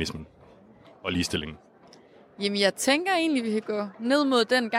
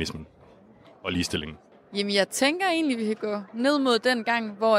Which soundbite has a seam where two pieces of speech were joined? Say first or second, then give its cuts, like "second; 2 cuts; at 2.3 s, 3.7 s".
second; 1 cut; at 1.7 s